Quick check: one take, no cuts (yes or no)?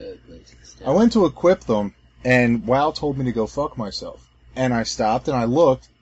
no